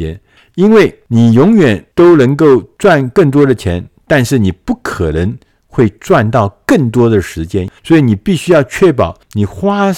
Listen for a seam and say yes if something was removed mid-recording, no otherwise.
no